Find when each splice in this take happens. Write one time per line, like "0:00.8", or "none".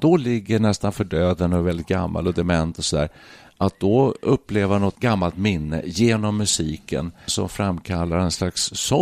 0:04.9
0:07.3